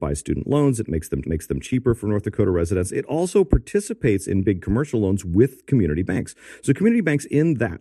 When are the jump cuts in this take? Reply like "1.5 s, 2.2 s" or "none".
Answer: 1.2 s